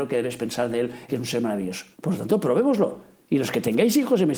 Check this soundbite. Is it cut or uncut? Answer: cut